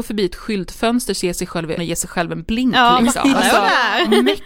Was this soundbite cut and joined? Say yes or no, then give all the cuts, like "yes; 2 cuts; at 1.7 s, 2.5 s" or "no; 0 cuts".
yes; 1 cut; at 1.8 s